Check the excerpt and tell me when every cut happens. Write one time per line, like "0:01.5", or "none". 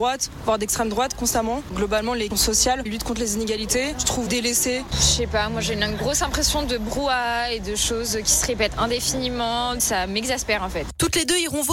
0:02.3
0:02.9
0:04.3